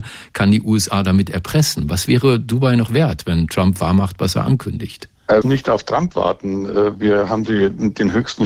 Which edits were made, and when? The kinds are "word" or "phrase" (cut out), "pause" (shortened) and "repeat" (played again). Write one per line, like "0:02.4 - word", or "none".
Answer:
0:05.4 - word